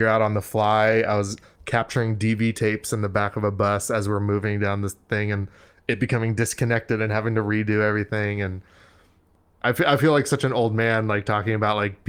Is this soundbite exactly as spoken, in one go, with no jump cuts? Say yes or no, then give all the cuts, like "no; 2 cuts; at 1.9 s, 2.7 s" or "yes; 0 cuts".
yes; 0 cuts